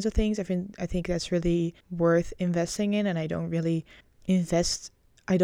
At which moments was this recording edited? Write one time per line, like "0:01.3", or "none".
0:01.8
0:04.0